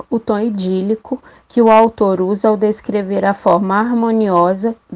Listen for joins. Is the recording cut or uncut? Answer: uncut